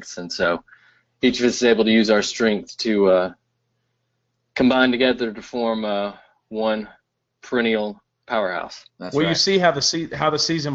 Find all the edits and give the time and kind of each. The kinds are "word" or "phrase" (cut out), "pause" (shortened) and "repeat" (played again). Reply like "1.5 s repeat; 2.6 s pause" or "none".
none